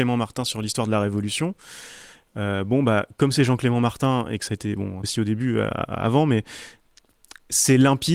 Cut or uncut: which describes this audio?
cut